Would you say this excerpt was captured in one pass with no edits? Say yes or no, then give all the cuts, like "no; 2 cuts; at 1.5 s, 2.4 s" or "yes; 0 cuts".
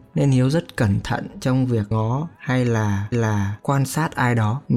no; 2 cuts; at 1.9 s, 3.1 s